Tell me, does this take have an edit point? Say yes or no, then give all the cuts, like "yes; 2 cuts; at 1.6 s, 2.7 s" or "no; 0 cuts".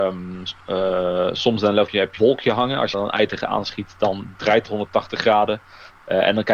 yes; 4 cuts; at 1.9 s, 2.2 s, 2.9 s, 4.7 s